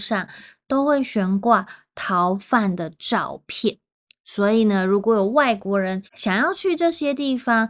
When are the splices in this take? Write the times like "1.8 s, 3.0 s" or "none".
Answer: 6.1 s